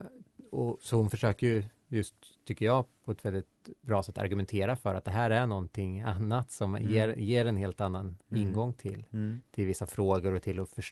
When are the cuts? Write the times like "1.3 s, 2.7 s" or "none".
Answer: 8.2 s